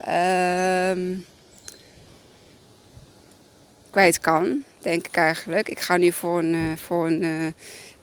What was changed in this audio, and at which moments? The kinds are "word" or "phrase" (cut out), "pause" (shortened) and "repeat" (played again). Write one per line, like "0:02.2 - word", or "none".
none